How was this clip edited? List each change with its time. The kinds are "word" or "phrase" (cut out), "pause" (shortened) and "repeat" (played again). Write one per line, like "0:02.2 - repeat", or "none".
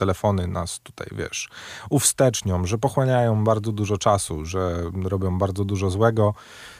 none